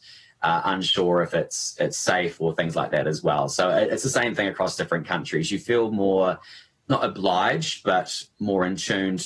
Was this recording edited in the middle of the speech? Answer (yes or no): no